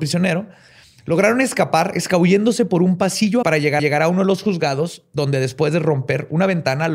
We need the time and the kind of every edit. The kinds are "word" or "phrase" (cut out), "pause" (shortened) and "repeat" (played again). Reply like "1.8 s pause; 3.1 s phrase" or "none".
3.4 s phrase; 3.8 s repeat

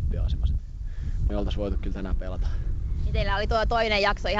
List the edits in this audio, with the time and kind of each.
1.3 s word

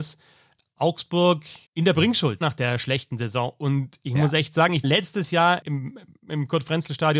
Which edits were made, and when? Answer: 1.6 s pause; 2.4 s word; 4.8 s word; 5.6 s word

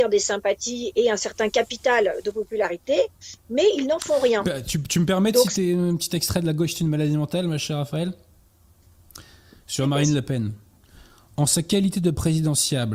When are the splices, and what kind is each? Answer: none

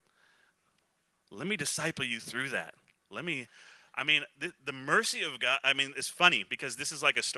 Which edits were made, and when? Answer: none

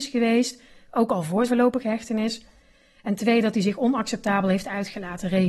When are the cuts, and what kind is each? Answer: 1.5 s word

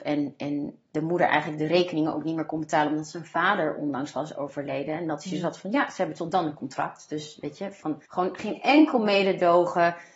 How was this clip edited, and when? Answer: 8.1 s pause

